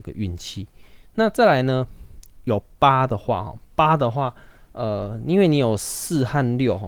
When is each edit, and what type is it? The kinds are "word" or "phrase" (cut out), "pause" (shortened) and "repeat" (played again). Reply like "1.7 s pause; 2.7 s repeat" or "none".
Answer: none